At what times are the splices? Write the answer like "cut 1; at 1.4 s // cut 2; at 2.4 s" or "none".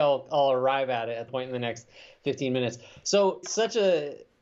cut 1; at 1.3 s // cut 2; at 3.4 s

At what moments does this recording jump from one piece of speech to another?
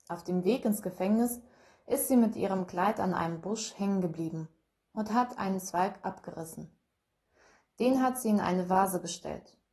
none

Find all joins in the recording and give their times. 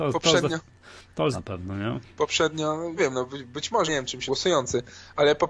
cut 1; at 1.3 s // cut 2; at 3.0 s // cut 3; at 3.9 s // cut 4; at 4.3 s

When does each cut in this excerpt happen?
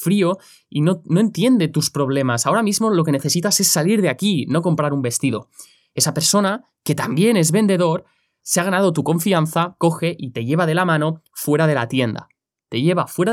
none

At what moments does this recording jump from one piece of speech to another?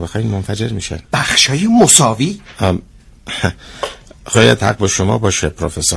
cut 1; at 1.1 s

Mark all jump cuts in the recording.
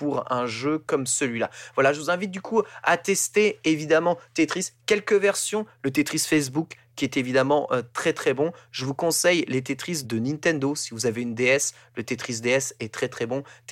cut 1; at 10.0 s

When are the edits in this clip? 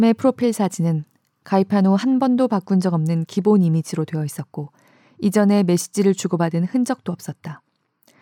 none

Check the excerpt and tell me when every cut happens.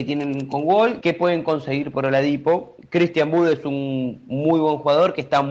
cut 1; at 1.0 s

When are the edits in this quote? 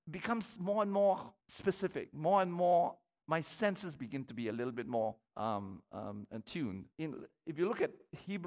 cut 1; at 1.4 s // cut 2; at 3.2 s // cut 3; at 5.2 s // cut 4; at 6.9 s

